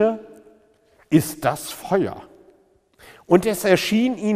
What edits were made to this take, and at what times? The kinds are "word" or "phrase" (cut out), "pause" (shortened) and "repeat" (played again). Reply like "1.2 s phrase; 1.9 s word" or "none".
none